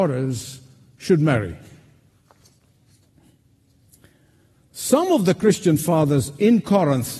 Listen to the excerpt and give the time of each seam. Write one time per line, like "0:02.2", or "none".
none